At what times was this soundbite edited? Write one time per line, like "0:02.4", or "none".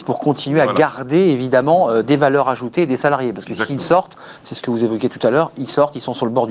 none